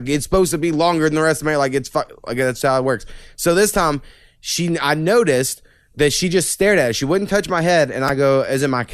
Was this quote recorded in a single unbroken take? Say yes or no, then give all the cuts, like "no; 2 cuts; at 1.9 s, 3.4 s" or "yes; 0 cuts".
yes; 0 cuts